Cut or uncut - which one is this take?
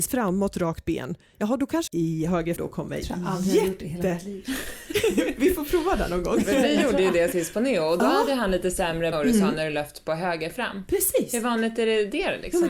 cut